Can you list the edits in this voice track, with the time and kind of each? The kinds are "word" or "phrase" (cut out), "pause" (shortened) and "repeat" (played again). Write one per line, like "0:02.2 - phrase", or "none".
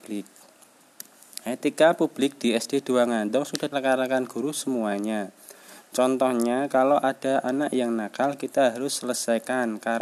0:03.7 - word